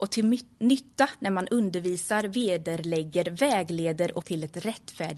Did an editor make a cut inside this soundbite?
yes; 1 cut; at 4.2 s

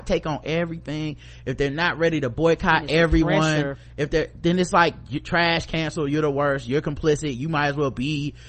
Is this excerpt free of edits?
yes; 0 cuts

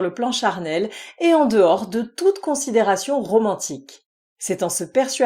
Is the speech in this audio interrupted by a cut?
no; 0 cuts

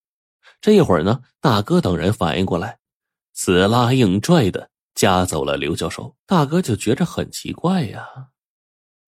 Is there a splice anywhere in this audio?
yes; 1 cut; at 6.2 s

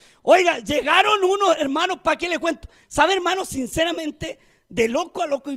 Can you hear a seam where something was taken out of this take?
no; 0 cuts

